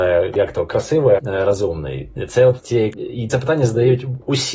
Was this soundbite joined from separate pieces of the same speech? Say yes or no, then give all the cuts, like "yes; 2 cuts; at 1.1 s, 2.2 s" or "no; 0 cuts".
yes; 3 cuts; at 1.2 s, 2.9 s, 3.3 s